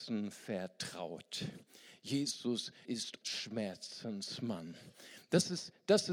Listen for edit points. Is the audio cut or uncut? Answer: cut